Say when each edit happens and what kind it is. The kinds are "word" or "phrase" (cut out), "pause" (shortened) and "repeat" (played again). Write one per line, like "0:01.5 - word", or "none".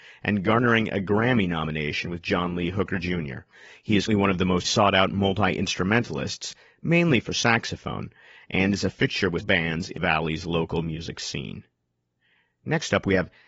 0:04.1 - word
0:04.6 - word
0:09.4 - word
0:10.0 - word